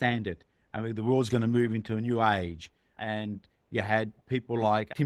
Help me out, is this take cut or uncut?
uncut